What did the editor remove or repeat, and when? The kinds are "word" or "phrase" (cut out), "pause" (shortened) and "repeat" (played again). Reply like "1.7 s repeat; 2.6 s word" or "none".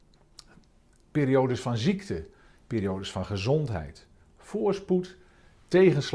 none